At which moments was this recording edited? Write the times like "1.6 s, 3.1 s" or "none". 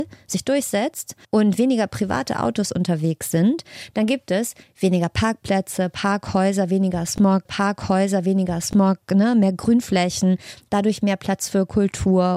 1.2 s, 7.5 s